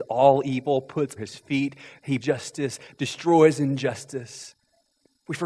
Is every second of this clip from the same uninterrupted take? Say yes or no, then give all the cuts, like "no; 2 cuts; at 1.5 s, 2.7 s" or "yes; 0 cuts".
no; 2 cuts; at 1.2 s, 2.2 s